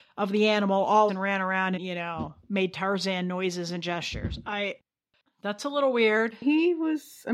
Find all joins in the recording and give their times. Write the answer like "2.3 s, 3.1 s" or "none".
1.1 s, 1.8 s

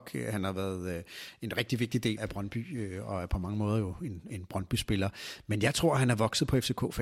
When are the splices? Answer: 2.2 s

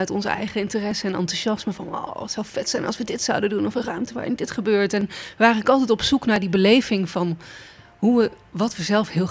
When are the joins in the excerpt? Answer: none

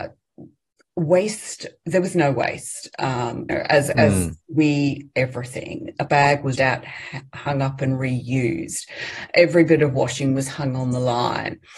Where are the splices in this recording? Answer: 3.5 s, 5.1 s, 6.1 s, 6.5 s

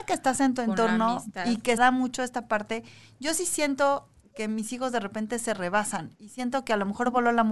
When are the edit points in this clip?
1.8 s, 4.3 s, 6.1 s

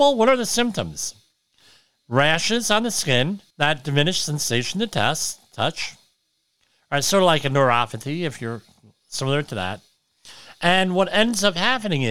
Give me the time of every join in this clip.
3.5 s

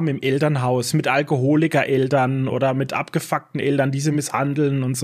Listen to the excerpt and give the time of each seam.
none

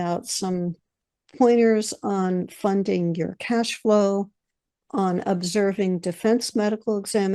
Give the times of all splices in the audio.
none

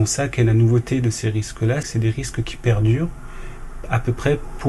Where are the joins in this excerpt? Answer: 1.8 s

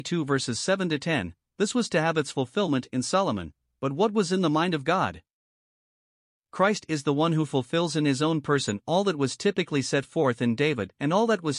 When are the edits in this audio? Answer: none

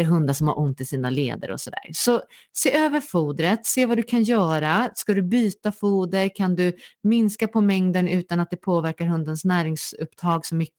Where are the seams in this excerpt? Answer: none

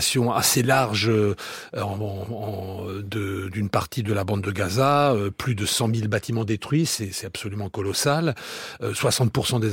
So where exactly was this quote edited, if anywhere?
none

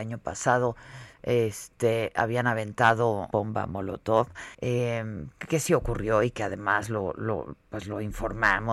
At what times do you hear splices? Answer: 3.3 s, 4.5 s

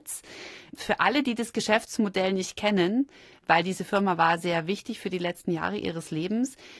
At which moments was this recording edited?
none

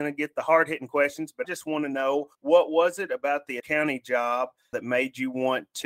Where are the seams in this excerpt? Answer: 1.4 s, 2.3 s, 3.6 s

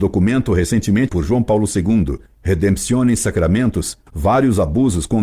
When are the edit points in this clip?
1.1 s

